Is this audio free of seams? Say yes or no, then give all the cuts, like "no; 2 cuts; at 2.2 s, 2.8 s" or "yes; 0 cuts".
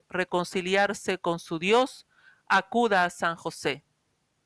yes; 0 cuts